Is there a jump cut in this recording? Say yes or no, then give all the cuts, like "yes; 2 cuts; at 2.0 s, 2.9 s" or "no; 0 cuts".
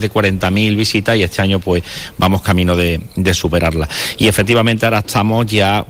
no; 0 cuts